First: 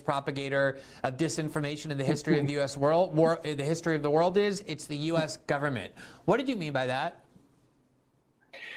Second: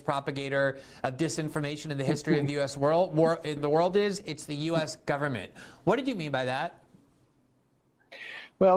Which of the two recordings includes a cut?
second; 1 cut; at 3.6 s

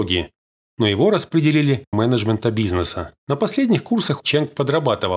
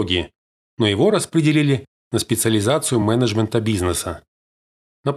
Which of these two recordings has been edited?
first; 3 cuts; at 1.9 s, 3.2 s, 4.2 s

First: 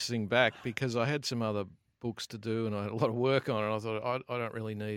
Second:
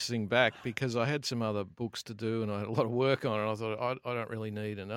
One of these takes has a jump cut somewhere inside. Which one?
second; 1 cut; at 1.7 s

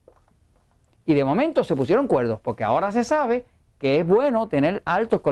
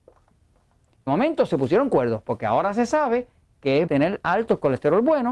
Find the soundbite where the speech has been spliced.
second; 2 cuts; at 1.1 s, 3.9 s

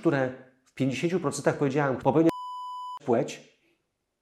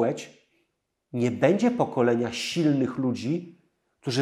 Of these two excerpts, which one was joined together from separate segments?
first; 2 cuts; at 2.0 s, 3.0 s

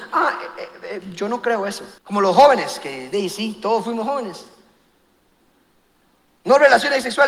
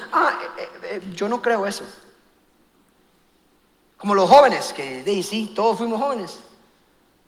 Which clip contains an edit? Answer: first; 1 cut; at 2.0 s

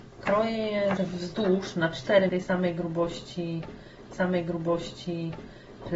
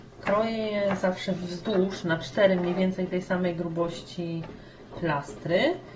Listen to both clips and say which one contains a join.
first; 3 cuts; at 1.0 s, 2.3 s, 4.1 s

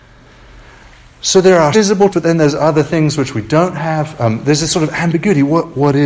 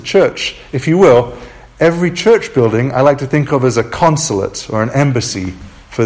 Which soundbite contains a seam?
first; 2 cuts; at 1.7 s, 2.1 s

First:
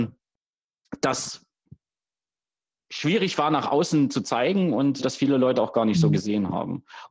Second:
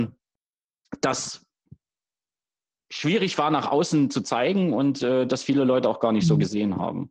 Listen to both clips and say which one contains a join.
first; 1 cut; at 5.0 s

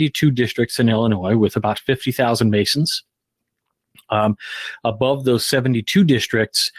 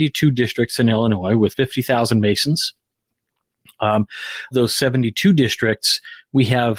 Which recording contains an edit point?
second; 2 cuts; at 1.5 s, 4.5 s

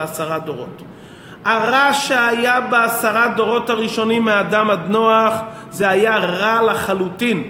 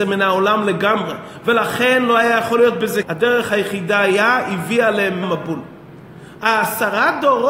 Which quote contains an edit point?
second; 2 cuts; at 3.0 s, 5.2 s

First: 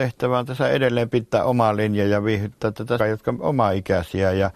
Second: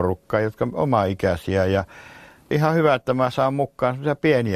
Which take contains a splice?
first; 1 cut; at 3.0 s

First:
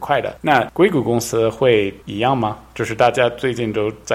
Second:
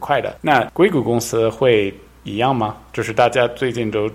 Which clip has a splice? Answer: first; 1 cut; at 2.0 s

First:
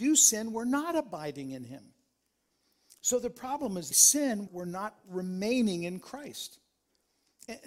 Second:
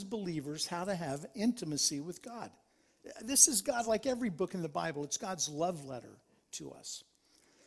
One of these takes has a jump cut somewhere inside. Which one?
first; 2 cuts; at 3.9 s, 4.5 s

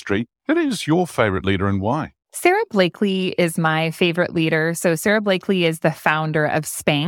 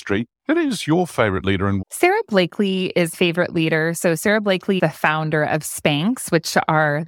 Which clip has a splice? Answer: second; 3 cuts; at 1.8 s, 3.1 s, 4.8 s

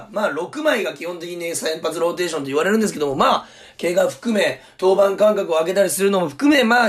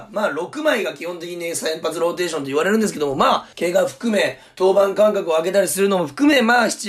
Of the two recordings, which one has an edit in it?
second; 1 cut; at 3.5 s

